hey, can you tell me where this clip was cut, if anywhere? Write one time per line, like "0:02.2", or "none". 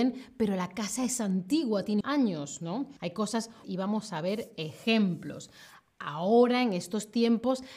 0:02.0
0:03.0
0:03.6